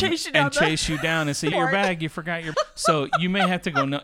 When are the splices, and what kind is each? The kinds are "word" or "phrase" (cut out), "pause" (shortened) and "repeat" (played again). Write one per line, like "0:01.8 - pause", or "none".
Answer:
0:01.5 - word
0:02.5 - word